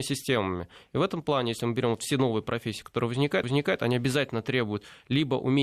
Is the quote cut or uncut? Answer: cut